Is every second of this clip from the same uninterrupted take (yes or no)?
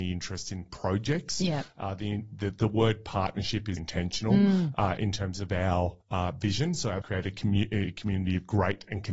no